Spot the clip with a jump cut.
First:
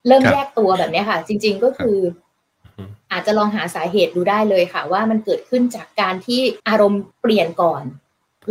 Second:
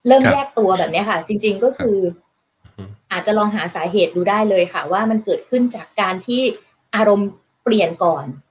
first; 2 cuts; at 6.6 s, 7.1 s

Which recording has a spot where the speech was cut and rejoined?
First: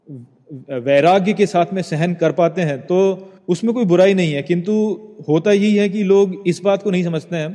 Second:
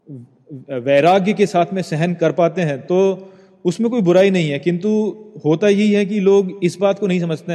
first; 1 cut; at 3.4 s

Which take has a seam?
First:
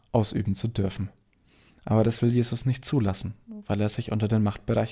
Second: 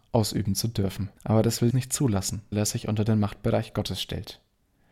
second; 3 cuts; at 1.2 s, 1.7 s, 2.5 s

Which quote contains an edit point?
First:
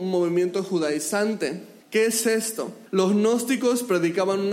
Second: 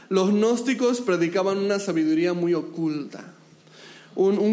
first; 2 cuts; at 1.8 s, 2.9 s

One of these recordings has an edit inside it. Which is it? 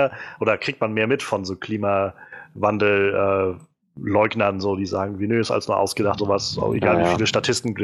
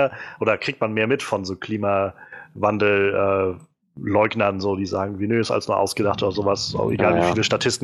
first; 1 cut; at 6.2 s

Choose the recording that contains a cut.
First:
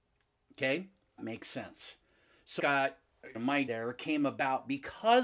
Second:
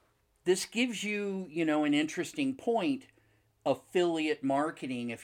first; 4 cuts; at 1.2 s, 2.6 s, 3.3 s, 3.7 s

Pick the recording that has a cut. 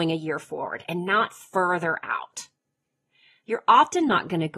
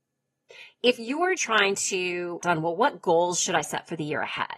second; 2 cuts; at 1.4 s, 2.4 s

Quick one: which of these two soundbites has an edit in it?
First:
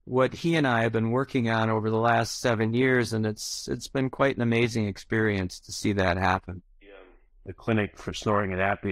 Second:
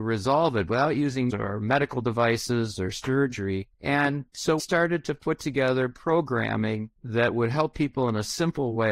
second; 4 cuts; at 1.3 s, 3.7 s, 4.6 s, 7.0 s

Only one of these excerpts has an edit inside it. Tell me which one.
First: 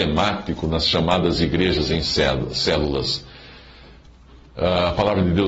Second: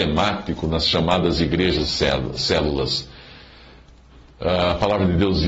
second; 1 cut; at 1.8 s

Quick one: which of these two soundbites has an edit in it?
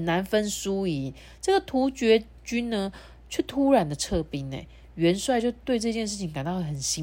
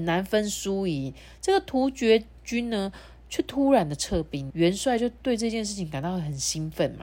second; 1 cut; at 4.5 s

